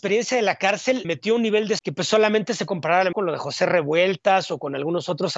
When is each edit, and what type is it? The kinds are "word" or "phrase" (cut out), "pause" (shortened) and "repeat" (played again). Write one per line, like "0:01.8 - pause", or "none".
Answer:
0:01.0 - word
0:01.8 - word
0:02.7 - word
0:03.1 - word